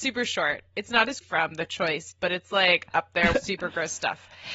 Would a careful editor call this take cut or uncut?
cut